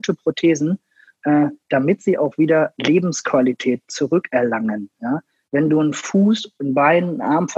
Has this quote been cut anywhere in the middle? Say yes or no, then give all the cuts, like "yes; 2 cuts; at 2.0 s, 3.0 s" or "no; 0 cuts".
no; 0 cuts